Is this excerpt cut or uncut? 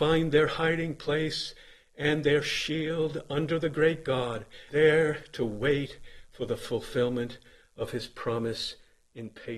cut